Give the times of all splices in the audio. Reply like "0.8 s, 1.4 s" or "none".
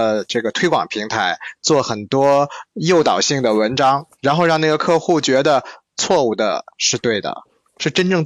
4.1 s